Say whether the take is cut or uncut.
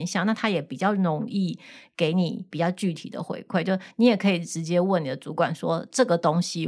uncut